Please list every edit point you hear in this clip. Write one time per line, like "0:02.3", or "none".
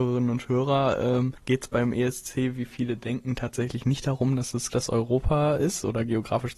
0:01.4
0:04.7